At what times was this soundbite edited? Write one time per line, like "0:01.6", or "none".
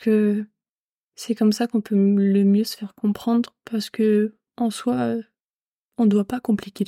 0:04.5